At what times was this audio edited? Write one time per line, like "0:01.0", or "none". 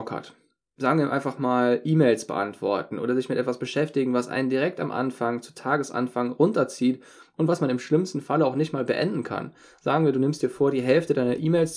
none